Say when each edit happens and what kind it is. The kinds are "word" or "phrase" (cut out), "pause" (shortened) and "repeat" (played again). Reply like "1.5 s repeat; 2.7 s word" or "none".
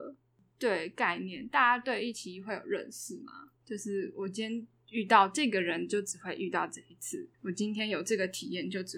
3.6 s pause; 7.3 s pause